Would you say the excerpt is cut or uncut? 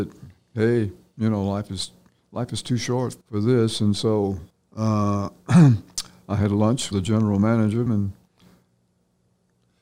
cut